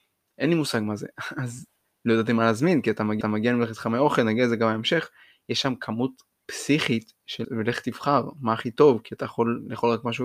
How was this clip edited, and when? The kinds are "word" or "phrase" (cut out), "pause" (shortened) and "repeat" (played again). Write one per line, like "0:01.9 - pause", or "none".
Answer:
0:03.2 - repeat
0:07.4 - word